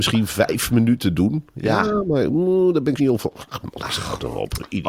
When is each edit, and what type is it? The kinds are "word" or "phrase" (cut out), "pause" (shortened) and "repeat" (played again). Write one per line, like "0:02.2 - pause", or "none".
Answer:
0:03.0 - word

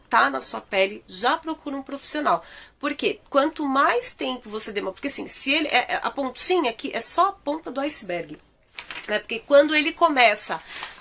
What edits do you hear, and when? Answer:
none

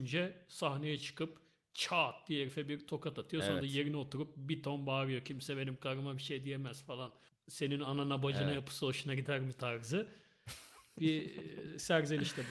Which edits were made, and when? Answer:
none

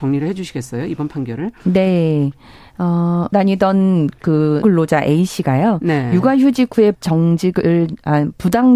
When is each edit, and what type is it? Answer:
0:03.3 - word
0:04.6 - word
0:06.9 - word

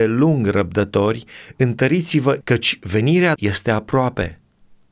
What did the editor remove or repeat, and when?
0:02.4 - word
0:03.4 - word

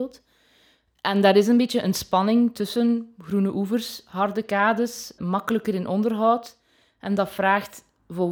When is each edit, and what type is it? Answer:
0:05.2 - word

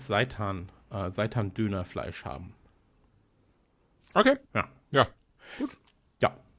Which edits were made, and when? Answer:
0:04.5 - pause

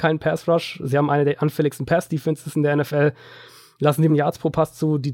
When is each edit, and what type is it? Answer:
0:04.1 - word

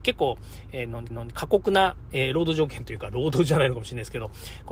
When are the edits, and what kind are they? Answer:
0:01.1 - repeat

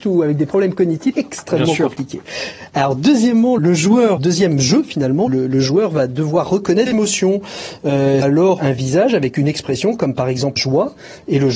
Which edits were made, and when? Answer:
0:01.1 - word
0:03.6 - word
0:04.2 - word
0:05.3 - word
0:06.9 - word
0:08.2 - word
0:08.6 - word
0:10.6 - word

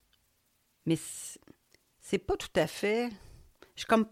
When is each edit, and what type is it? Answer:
none

